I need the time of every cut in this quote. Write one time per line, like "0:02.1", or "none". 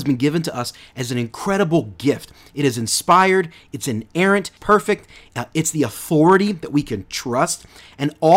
0:04.6